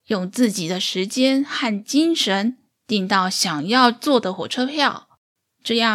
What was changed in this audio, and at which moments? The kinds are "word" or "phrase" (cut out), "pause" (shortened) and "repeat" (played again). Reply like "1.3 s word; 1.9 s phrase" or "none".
none